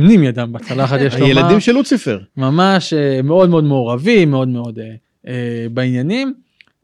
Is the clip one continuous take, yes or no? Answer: no